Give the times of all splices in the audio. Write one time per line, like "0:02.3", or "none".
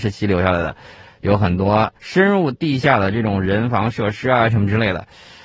0:02.0